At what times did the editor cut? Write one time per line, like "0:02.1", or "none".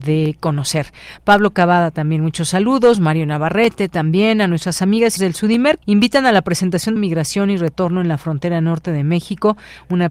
0:05.2
0:05.8
0:07.0